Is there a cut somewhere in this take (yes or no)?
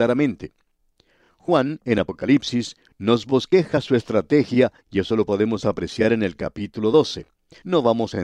no